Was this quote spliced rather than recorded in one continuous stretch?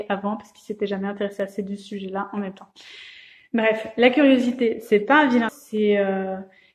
yes; 1 cut; at 5.5 s

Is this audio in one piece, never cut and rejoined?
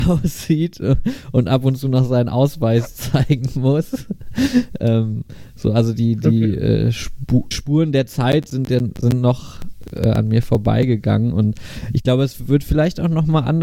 no; 1 cut; at 7.5 s

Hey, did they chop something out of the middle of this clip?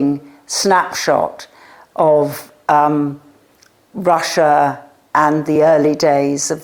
no; 0 cuts

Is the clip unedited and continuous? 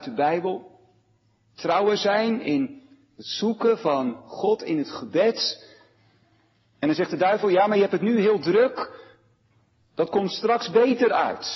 yes; 0 cuts

